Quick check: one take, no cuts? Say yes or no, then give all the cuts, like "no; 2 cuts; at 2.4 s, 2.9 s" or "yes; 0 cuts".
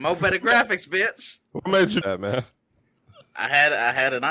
no; 1 cut; at 2.0 s